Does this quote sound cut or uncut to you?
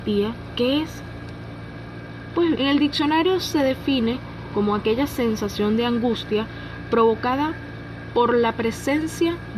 cut